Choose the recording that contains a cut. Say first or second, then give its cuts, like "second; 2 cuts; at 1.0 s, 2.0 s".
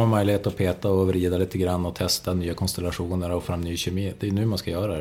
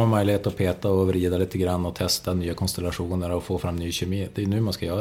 first; 1 cut; at 3.4 s